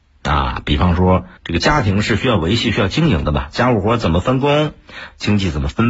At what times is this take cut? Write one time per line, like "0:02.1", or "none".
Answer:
0:01.4